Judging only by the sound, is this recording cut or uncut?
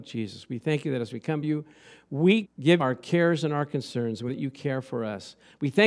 cut